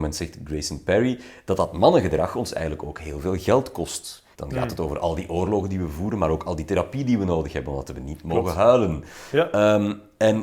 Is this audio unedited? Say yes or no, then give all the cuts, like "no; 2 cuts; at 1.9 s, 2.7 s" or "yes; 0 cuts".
no; 1 cut; at 4.3 s